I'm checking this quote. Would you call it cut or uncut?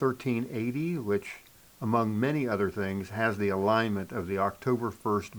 uncut